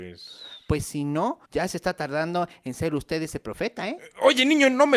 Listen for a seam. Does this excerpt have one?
yes; 1 cut; at 1.5 s

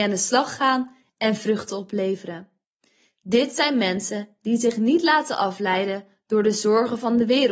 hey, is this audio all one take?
yes; 0 cuts

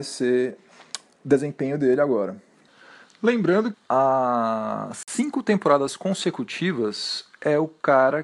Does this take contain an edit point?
yes; 1 cut; at 3.7 s

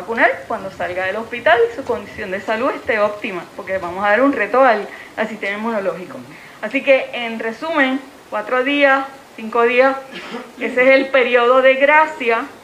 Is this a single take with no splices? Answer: no; 2 cuts; at 8.3 s, 9.3 s

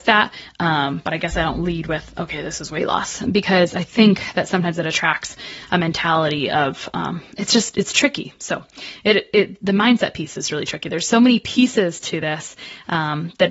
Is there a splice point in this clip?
no; 0 cuts

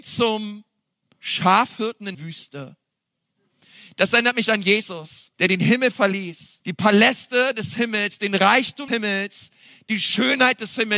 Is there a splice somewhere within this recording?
yes; 4 cuts; at 2.1 s, 5.3 s, 6.6 s, 8.9 s

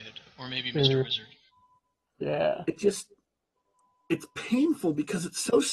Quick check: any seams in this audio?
no; 0 cuts

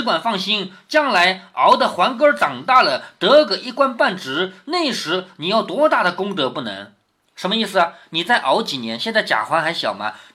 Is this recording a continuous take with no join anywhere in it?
yes; 0 cuts

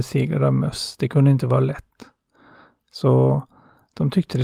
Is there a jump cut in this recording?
no; 0 cuts

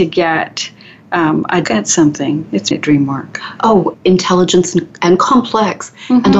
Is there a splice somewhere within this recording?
yes; 3 cuts; at 1.6 s, 2.7 s, 3.9 s

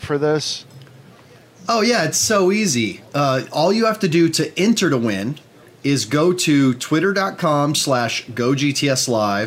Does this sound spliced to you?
no; 0 cuts

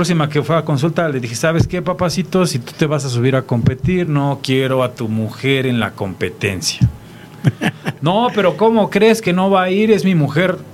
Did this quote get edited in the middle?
no; 0 cuts

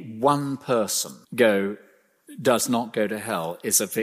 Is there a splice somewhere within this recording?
yes; 1 cut; at 1.2 s

